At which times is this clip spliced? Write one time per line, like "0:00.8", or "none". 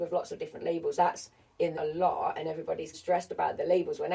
0:01.0
0:01.7
0:02.9